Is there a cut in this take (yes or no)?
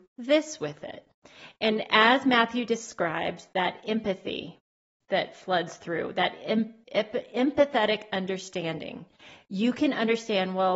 no